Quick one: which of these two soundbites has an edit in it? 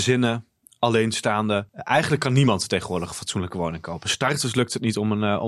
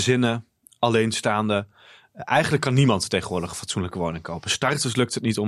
first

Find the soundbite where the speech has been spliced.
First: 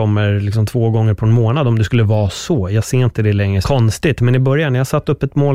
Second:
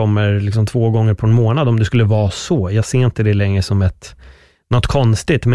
first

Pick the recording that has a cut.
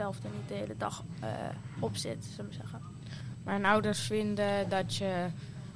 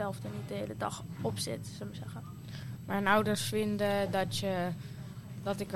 second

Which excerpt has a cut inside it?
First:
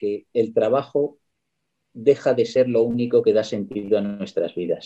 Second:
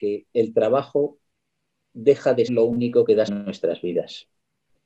second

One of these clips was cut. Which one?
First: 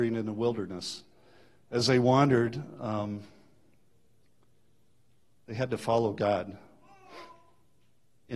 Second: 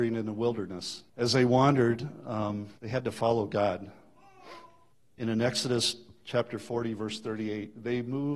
second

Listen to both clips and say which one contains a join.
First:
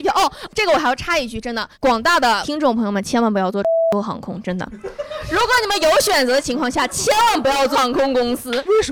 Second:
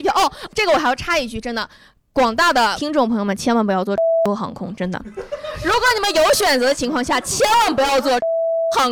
first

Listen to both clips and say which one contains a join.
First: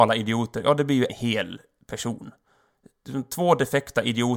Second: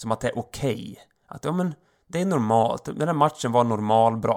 first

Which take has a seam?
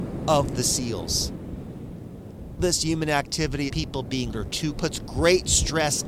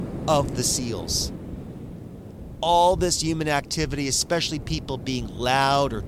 first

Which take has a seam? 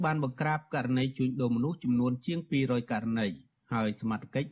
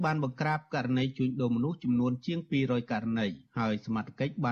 second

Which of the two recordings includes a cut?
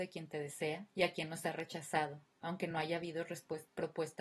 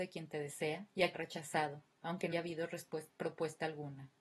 second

